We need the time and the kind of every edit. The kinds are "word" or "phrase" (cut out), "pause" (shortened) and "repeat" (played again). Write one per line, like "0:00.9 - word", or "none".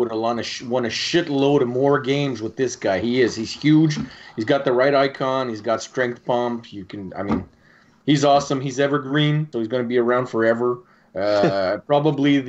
0:09.5 - word